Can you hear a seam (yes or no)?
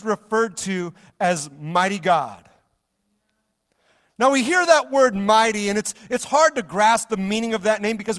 no